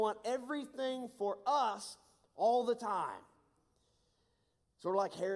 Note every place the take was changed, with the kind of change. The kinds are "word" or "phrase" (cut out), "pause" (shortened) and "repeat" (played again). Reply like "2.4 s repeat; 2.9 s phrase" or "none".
none